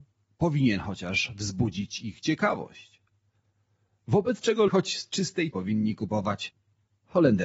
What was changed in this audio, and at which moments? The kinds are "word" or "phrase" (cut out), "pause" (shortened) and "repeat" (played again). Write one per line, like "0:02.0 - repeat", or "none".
0:04.7 - word
0:05.5 - word